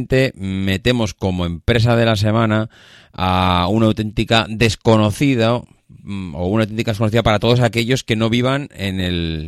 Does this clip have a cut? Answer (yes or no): no